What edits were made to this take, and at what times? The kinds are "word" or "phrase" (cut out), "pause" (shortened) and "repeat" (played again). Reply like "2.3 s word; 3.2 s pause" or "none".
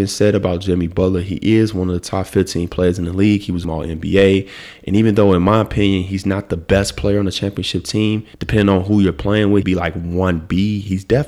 3.6 s phrase; 8.3 s pause; 9.6 s phrase